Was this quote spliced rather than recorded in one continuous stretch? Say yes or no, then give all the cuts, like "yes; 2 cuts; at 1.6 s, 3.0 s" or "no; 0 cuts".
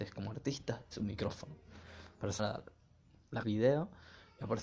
yes; 3 cuts; at 0.9 s, 2.4 s, 3.4 s